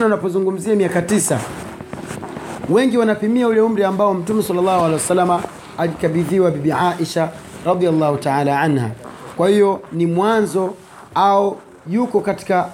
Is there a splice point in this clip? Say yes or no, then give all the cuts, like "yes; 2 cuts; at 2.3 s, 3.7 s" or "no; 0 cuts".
no; 0 cuts